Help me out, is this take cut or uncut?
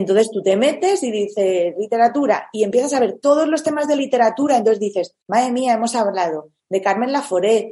cut